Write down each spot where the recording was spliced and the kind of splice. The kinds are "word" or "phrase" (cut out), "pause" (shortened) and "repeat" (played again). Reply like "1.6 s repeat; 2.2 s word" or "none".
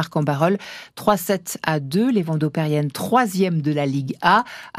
none